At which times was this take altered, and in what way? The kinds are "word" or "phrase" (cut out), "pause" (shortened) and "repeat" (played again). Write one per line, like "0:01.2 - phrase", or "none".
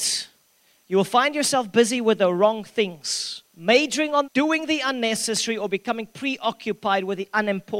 0:03.5 - pause
0:04.3 - phrase

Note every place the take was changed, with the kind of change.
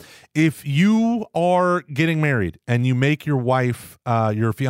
none

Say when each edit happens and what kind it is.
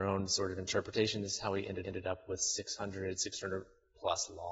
0:01.8 - repeat

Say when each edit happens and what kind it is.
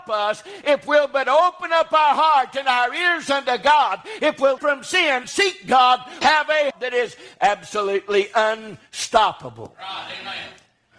0:04.6 - word
0:05.2 - word
0:06.2 - word
0:06.7 - word

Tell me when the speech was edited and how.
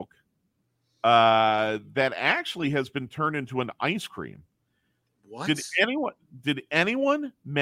none

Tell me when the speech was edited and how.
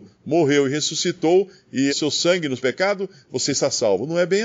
0:01.9 - word
0:02.6 - phrase

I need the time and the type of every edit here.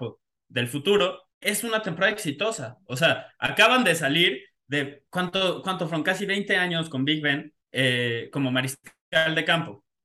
0:01.3 - pause
0:05.1 - pause
0:07.6 - pause

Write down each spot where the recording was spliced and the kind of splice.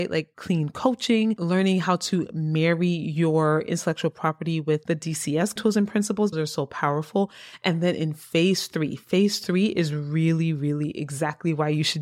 0:05.6 - word
0:06.3 - phrase

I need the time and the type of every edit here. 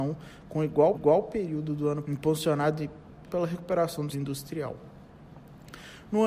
0:00.9 - repeat
0:02.0 - word
0:03.3 - word
0:04.1 - word

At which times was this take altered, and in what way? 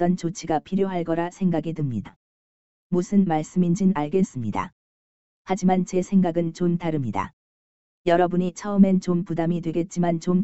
none

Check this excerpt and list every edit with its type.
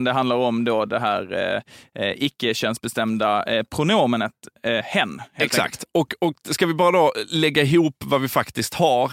none

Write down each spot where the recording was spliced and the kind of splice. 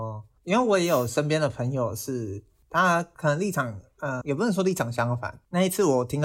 0:04.2 - word

